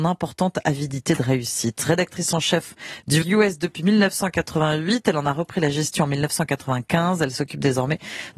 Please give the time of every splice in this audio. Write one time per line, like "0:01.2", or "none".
0:03.2

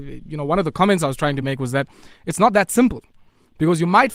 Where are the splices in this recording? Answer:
none

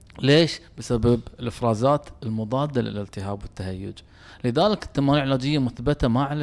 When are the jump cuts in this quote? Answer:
none

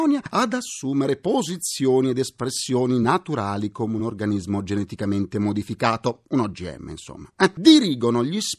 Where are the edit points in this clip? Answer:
none

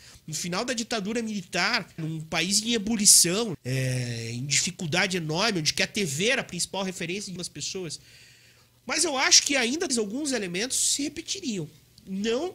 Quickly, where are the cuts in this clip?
0:02.0
0:03.5
0:07.4
0:09.9

